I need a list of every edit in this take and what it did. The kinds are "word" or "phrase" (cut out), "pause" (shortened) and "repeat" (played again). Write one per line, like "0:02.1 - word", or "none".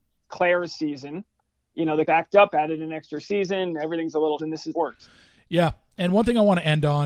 0:02.0 - phrase
0:04.4 - word
0:04.7 - phrase